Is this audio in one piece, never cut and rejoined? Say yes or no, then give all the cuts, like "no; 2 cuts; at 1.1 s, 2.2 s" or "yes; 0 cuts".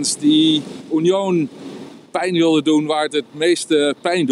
yes; 0 cuts